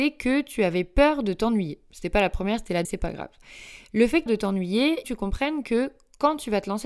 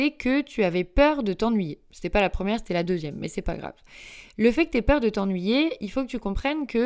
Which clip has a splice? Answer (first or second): first